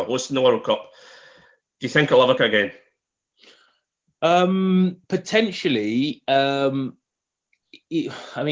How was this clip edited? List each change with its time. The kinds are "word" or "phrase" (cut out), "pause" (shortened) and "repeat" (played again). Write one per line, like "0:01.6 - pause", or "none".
0:02.4 - phrase
0:05.0 - pause